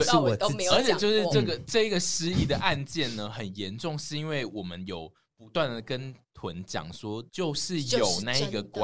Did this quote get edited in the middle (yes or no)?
yes